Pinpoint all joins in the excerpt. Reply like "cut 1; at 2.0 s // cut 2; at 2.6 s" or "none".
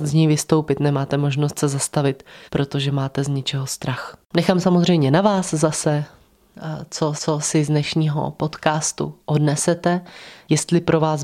cut 1; at 2.5 s // cut 2; at 4.2 s // cut 3; at 7.2 s